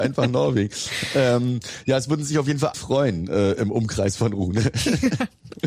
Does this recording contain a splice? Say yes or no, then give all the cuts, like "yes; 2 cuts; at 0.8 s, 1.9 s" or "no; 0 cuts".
yes; 1 cut; at 2.7 s